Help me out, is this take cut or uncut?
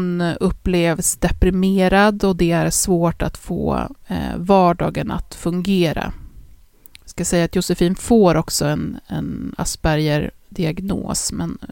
uncut